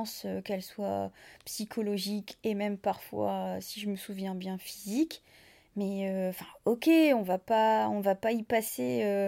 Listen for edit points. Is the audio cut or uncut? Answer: uncut